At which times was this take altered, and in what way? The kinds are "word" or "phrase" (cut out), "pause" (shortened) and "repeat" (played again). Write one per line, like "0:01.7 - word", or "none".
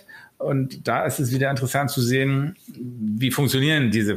none